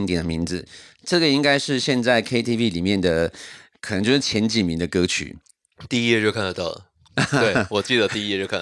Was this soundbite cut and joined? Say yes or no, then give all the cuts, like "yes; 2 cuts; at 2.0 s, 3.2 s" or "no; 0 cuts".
no; 0 cuts